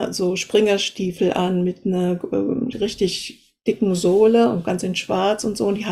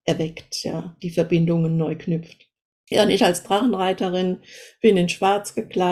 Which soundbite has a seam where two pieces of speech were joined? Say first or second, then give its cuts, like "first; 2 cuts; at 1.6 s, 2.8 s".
second; 2 cuts; at 1.0 s, 2.6 s